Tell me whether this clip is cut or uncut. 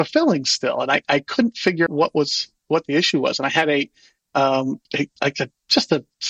cut